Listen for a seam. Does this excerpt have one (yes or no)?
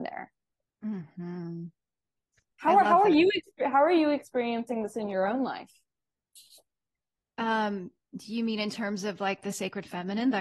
no